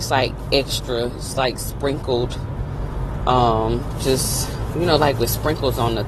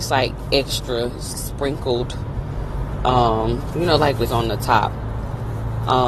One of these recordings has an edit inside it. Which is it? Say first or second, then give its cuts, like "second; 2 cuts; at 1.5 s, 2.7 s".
second; 3 cuts; at 1.3 s, 3.7 s, 4.3 s